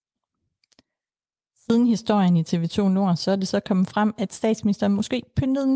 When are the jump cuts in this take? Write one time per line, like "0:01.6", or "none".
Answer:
none

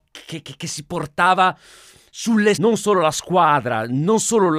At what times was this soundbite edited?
0:02.5

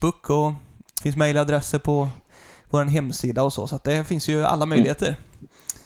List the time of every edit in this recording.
0:01.0

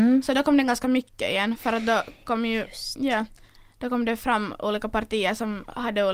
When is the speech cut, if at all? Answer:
none

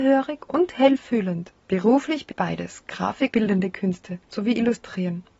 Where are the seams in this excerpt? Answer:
0:01.6
0:02.3
0:03.3
0:04.2

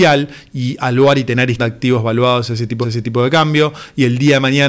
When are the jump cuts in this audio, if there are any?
0:01.6
0:02.8

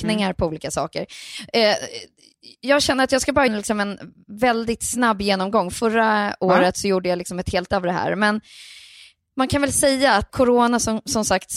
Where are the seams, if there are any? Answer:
0:03.5
0:07.7
0:10.3

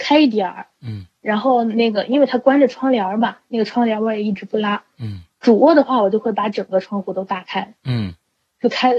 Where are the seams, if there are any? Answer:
none

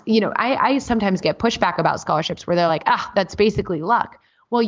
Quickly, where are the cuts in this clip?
none

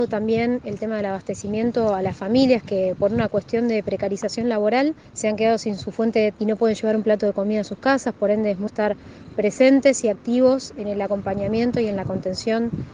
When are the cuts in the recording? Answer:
0:06.3
0:08.7

